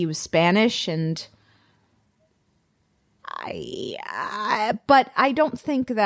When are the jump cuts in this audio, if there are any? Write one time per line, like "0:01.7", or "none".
none